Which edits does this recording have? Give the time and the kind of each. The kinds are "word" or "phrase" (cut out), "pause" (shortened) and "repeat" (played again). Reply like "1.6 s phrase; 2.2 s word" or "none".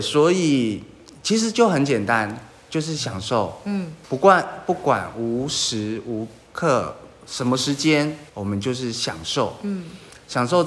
4.0 s pause; 8.3 s pause